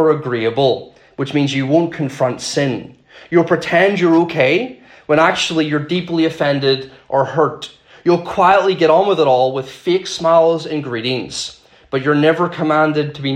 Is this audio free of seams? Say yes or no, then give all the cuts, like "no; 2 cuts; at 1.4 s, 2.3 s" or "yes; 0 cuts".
yes; 0 cuts